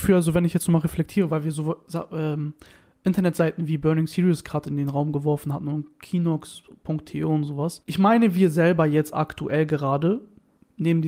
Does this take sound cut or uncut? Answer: uncut